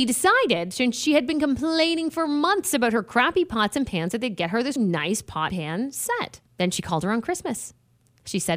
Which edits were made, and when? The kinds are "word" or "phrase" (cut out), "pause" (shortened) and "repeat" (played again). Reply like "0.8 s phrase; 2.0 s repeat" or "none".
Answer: 4.8 s word; 5.5 s word; 6.5 s pause